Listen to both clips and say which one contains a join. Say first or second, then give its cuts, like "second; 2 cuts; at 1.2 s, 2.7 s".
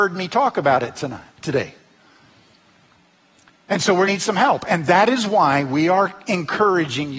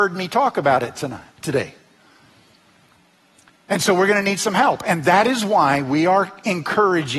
first; 1 cut; at 4.1 s